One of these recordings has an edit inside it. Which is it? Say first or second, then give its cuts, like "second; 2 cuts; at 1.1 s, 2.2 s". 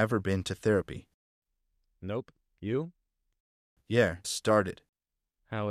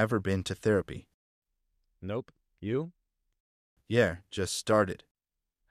first; 1 cut; at 4.2 s